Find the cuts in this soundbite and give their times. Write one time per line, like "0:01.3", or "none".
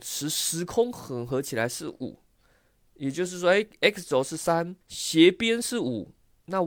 0:04.8